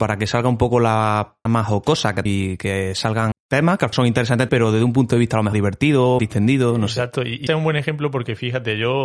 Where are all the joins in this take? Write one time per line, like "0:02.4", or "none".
0:01.5
0:02.3
0:03.3
0:03.9
0:04.5
0:05.5
0:06.2
0:07.5